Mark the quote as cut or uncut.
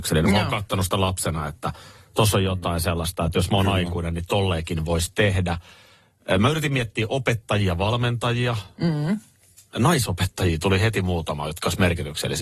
uncut